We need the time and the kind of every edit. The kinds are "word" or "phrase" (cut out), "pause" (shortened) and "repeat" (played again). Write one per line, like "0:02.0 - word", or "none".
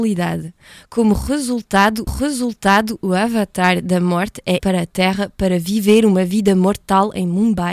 0:02.1 - repeat
0:04.6 - word